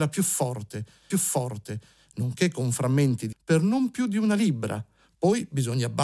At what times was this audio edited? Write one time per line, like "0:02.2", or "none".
0:01.1
0:03.3

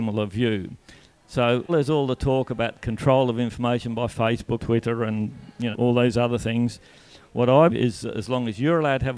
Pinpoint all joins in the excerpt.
0:01.7
0:02.7
0:04.6
0:05.7
0:07.7

